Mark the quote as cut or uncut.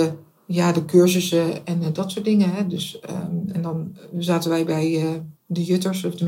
cut